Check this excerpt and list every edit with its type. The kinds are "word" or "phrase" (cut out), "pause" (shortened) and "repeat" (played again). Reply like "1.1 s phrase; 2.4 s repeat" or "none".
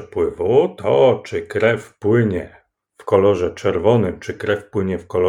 none